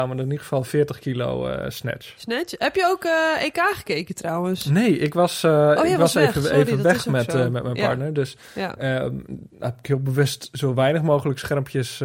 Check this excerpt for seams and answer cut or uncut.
uncut